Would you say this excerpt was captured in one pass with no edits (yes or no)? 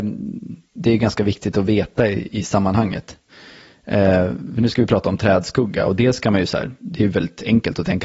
yes